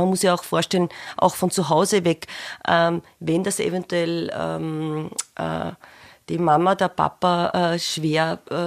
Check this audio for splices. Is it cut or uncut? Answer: uncut